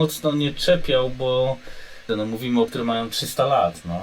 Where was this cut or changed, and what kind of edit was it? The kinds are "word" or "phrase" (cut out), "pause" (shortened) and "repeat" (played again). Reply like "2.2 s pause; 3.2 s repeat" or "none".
2.1 s word; 2.7 s word

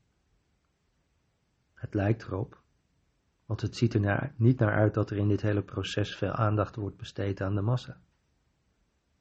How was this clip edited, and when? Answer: none

